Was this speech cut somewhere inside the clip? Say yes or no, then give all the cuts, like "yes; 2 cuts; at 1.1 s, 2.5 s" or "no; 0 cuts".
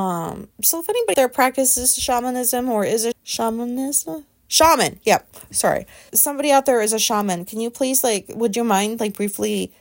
yes; 4 cuts; at 1.1 s, 3.1 s, 4.4 s, 6.1 s